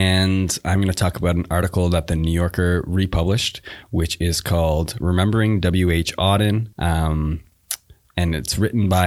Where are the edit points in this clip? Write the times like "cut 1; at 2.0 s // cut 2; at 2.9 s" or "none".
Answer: cut 1; at 6.7 s